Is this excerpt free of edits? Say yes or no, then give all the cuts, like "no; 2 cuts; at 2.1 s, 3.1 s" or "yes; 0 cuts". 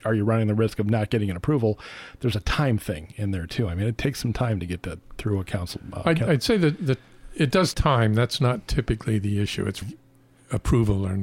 no; 2 cuts; at 7.7 s, 9.8 s